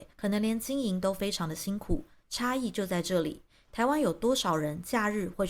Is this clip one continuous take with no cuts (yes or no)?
yes